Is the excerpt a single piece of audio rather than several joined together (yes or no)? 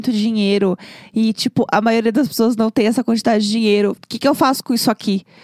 yes